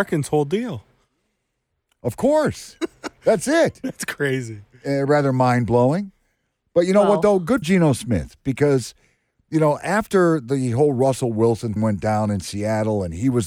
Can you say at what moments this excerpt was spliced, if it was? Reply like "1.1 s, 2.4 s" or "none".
7.6 s, 11.8 s

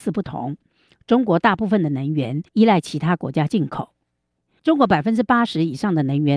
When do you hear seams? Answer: 2.5 s

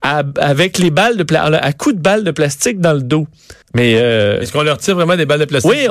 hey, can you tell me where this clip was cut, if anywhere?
3.6 s

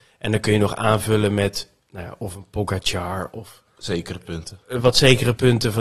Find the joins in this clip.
1.8 s, 4.6 s

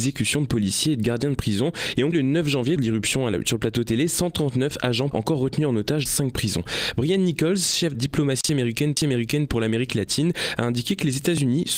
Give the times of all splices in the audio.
2.1 s, 2.8 s, 5.1 s, 6.1 s, 7.9 s, 9.0 s

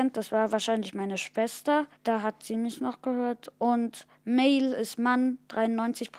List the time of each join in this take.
1.9 s

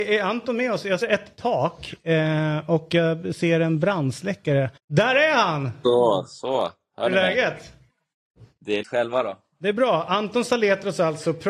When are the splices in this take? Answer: 1.0 s, 4.8 s, 8.8 s

